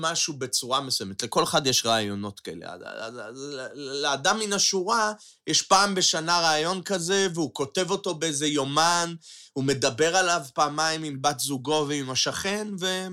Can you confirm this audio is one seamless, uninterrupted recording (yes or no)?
yes